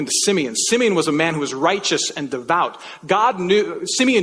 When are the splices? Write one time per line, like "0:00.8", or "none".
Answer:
none